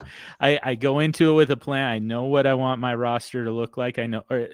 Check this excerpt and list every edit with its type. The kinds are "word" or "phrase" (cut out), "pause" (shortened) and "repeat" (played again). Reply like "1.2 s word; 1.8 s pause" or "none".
none